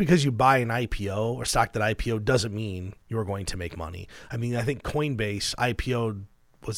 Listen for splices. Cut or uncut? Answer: cut